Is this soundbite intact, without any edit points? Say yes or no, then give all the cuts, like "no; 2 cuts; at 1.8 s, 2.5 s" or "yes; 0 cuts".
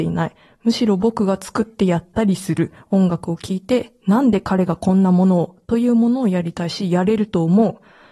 yes; 0 cuts